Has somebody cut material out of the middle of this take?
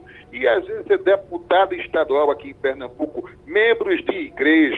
no; 0 cuts

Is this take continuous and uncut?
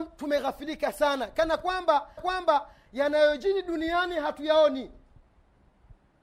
no; 1 cut; at 2.2 s

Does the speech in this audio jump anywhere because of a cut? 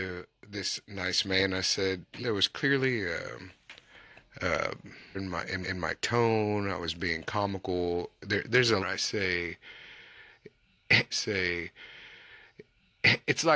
yes; 5 cuts; at 2.2 s, 5.1 s, 5.6 s, 8.8 s, 11.1 s

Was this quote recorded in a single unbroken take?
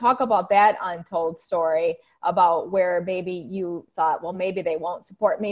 yes; 0 cuts

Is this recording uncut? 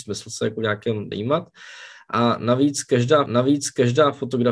no; 2 cuts; at 1.1 s, 3.3 s

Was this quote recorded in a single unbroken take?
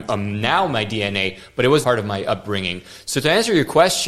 no; 1 cut; at 1.8 s

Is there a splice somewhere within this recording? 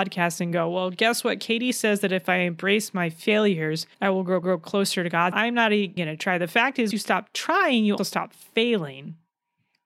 yes; 6 cuts; at 3.9 s, 4.4 s, 5.3 s, 6.0 s, 6.9 s, 8.0 s

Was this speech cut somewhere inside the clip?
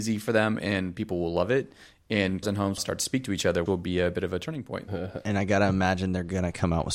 yes; 3 cuts; at 2.4 s, 2.8 s, 3.7 s

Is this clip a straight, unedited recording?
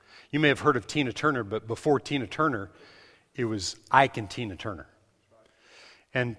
yes; 0 cuts

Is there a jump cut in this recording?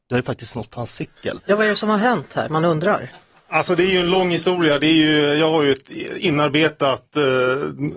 no; 0 cuts

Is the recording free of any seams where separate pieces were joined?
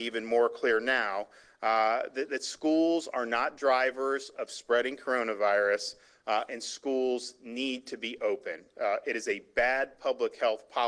yes; 0 cuts

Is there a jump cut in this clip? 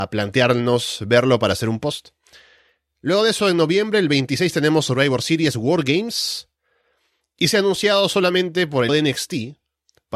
yes; 1 cut; at 8.9 s

